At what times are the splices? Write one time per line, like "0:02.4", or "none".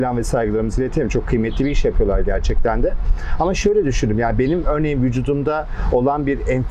none